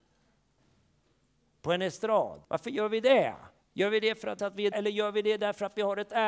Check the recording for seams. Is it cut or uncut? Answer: cut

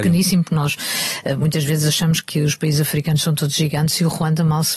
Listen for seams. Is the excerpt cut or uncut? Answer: uncut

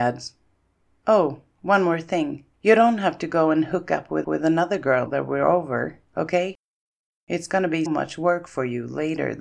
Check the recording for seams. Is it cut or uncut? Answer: cut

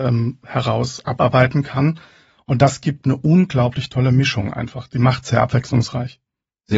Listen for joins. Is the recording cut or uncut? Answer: uncut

